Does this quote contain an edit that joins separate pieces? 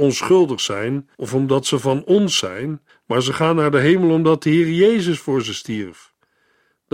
yes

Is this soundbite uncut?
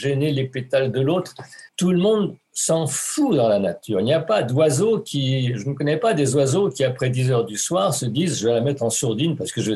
no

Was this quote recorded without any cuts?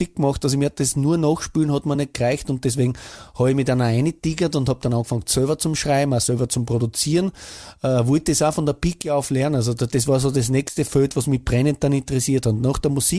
yes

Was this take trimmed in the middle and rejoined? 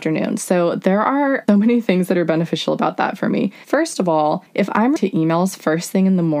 yes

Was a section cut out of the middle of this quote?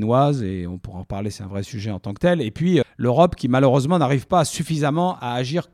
yes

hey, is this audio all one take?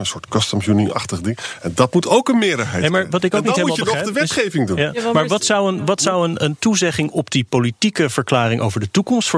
yes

